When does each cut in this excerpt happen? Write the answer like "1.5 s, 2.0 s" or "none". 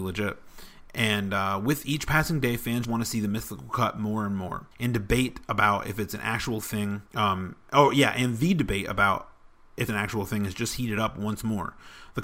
2.8 s, 4.7 s, 7.1 s, 9.9 s